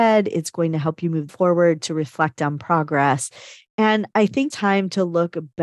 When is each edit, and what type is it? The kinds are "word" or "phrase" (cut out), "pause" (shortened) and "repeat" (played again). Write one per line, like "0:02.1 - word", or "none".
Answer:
0:01.3 - phrase
0:04.5 - word